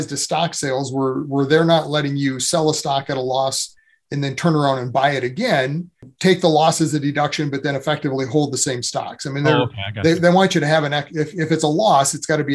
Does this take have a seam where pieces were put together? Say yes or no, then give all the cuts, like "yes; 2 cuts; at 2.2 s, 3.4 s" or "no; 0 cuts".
no; 0 cuts